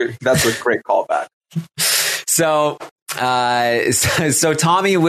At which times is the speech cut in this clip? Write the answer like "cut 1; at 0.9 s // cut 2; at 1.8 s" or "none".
none